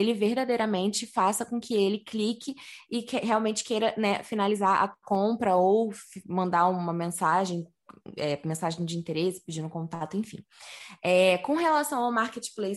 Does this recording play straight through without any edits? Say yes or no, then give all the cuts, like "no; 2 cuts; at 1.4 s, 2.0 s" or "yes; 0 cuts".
yes; 0 cuts